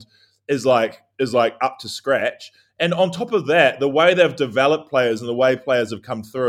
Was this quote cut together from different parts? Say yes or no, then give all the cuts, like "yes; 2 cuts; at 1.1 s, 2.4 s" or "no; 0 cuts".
no; 0 cuts